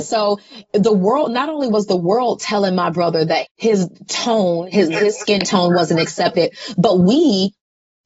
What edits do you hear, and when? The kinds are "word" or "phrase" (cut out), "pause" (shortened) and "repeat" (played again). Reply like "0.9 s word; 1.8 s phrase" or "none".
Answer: 3.5 s word